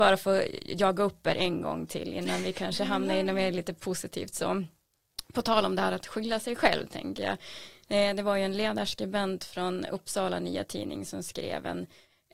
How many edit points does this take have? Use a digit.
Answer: 0